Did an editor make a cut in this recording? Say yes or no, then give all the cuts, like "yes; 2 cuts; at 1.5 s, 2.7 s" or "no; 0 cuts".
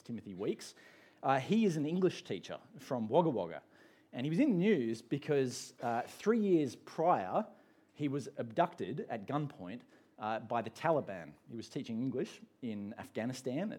no; 0 cuts